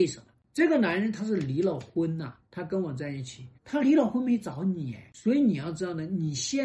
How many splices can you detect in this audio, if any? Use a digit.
2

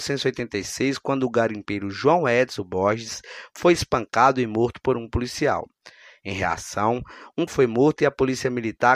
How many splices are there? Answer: 1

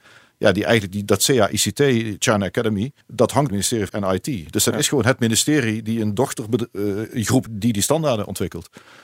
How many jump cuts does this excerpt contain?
4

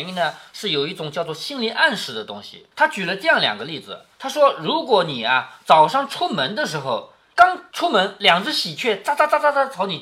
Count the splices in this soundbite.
2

